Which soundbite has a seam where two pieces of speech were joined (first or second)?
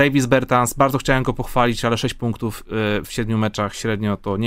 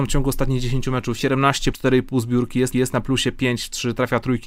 second